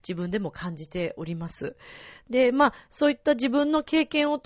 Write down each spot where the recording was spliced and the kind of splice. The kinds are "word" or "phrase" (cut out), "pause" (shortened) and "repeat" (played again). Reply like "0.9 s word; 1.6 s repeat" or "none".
none

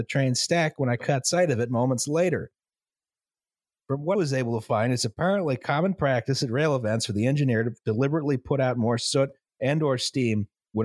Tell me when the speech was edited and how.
4.2 s word

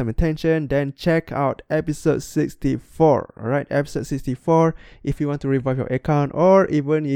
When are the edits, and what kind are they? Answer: none

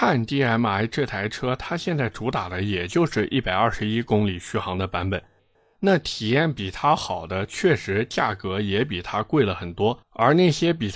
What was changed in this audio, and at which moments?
10.0 s pause

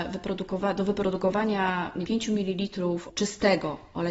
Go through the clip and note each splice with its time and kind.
2.1 s word; 3.1 s word

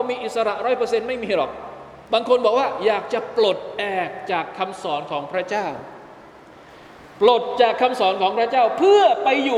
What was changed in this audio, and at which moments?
2.1 s pause

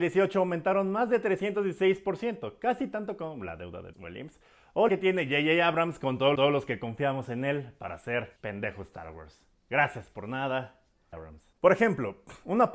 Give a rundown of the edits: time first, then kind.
3.9 s word; 4.9 s word; 6.4 s repeat; 8.4 s pause; 11.1 s word; 11.5 s pause

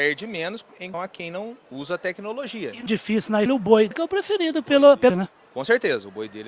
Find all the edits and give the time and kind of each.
0.9 s word; 2.9 s word; 3.5 s word; 3.9 s word; 5.1 s word

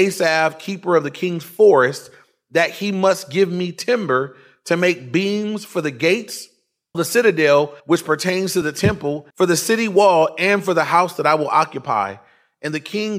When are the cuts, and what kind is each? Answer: 6.9 s word; 7.8 s pause; 9.3 s pause

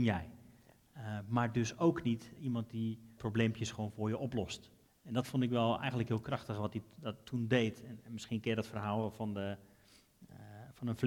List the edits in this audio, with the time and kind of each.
2.4 s word; 3.2 s word; 4.9 s pause

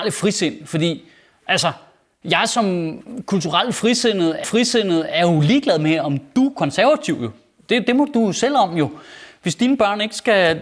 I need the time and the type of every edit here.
4.4 s repeat

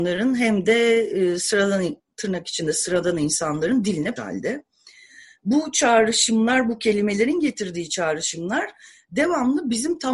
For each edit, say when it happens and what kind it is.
4.2 s phrase

